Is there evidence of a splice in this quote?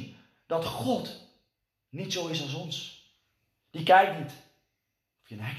no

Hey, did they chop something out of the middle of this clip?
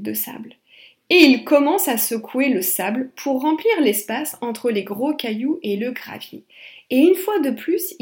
no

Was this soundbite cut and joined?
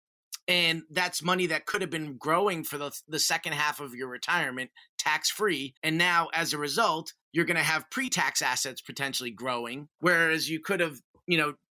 yes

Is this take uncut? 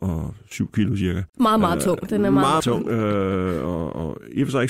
no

